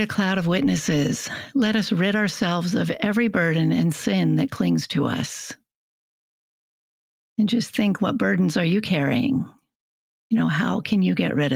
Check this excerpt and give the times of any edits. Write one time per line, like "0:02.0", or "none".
none